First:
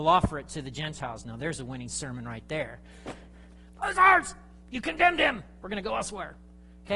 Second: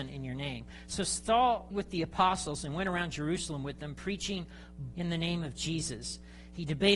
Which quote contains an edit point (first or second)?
second